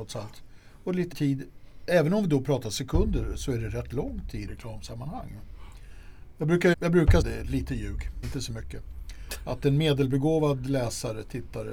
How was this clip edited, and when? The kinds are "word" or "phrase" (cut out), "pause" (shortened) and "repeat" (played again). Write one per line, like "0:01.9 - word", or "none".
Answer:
0:01.1 - word
0:04.5 - word
0:06.7 - word
0:07.2 - word
0:08.2 - word